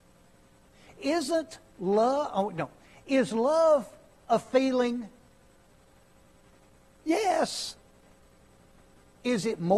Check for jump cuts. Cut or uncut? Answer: uncut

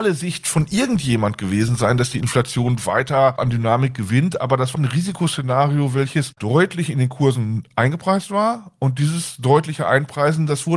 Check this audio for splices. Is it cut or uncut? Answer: cut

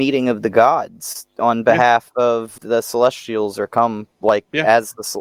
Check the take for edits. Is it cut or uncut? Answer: cut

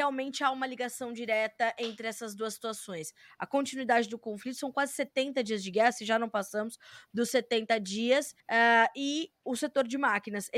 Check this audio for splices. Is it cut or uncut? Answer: cut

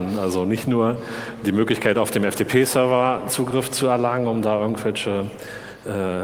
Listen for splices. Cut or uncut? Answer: uncut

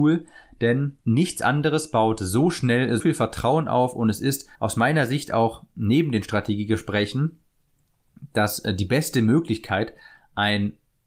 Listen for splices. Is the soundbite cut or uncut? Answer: cut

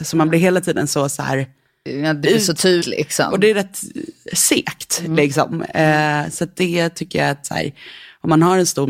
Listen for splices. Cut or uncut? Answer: cut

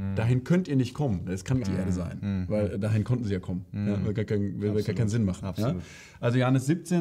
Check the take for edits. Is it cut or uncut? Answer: cut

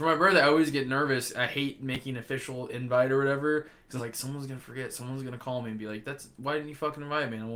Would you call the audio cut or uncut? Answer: cut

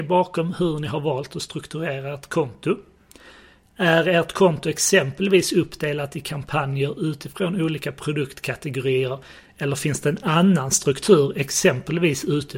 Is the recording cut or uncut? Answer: uncut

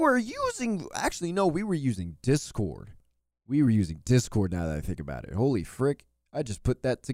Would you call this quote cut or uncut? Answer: uncut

